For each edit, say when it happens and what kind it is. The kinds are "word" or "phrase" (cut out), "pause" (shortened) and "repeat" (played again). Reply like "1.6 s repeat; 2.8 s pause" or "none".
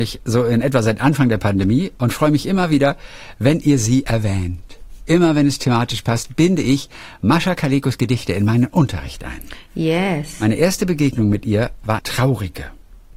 12.0 s word